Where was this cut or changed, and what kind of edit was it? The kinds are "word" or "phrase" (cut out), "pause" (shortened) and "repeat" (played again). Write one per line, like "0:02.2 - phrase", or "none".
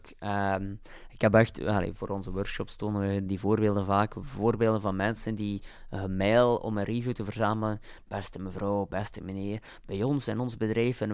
0:03.3 - word